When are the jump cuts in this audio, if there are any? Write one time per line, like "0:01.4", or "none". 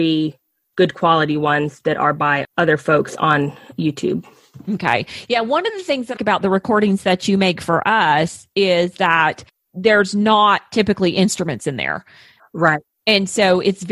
0:02.4
0:06.2
0:09.5